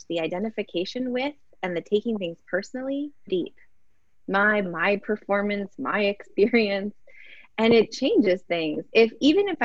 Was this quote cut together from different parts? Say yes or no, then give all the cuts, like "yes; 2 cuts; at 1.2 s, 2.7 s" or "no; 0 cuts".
yes; 3 cuts; at 3.3 s, 4.6 s, 7.9 s